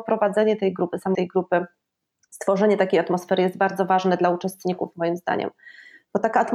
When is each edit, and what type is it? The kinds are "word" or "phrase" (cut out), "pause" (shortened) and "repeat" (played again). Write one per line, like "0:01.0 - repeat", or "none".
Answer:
0:01.1 - word